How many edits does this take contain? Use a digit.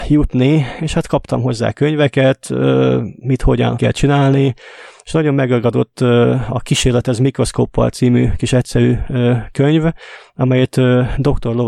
1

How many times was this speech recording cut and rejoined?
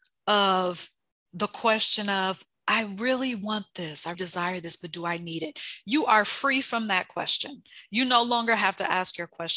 1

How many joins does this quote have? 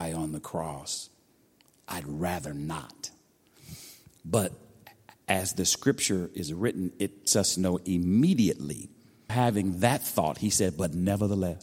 2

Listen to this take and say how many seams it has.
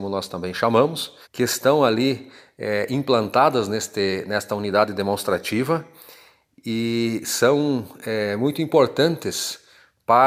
1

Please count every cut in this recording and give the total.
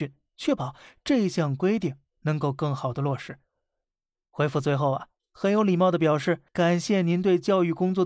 1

